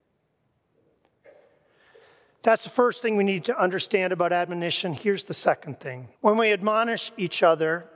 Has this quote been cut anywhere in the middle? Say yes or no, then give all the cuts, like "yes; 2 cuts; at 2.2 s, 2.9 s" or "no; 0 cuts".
yes; 1 cut; at 6.1 s